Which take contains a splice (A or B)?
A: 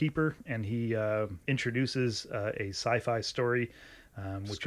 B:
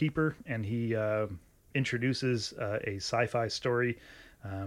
A